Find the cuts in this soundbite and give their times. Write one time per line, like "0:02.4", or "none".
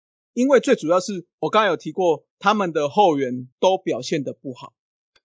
0:01.3
0:02.3
0:03.5